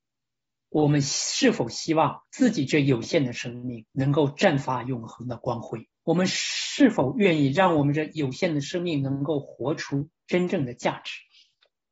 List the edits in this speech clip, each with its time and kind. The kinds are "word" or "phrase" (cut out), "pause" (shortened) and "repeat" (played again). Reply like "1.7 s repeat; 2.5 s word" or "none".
2.3 s pause; 3.9 s pause; 5.9 s pause